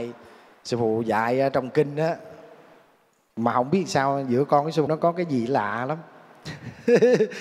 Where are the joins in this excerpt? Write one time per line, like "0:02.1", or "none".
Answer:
0:04.9